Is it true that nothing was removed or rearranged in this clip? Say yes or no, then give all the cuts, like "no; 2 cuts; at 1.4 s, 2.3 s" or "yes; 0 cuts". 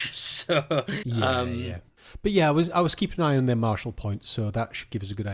no; 1 cut; at 1.0 s